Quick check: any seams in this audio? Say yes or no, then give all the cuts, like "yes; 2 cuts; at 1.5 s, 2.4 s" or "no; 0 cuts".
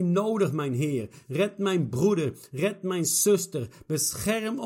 no; 0 cuts